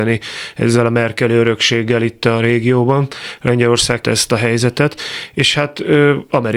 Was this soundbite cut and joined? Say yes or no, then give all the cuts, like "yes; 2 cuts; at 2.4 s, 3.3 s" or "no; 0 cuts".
yes; 1 cut; at 4.0 s